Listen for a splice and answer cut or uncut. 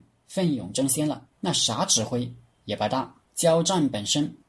cut